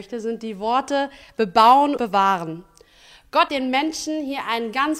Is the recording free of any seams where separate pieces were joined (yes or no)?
no